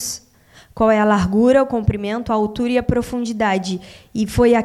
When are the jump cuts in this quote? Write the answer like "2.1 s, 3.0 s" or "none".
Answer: none